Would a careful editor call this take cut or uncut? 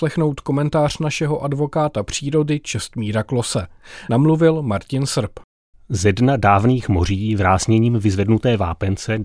uncut